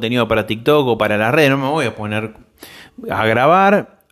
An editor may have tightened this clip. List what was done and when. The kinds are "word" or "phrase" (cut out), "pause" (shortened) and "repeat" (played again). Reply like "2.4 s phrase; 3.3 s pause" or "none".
none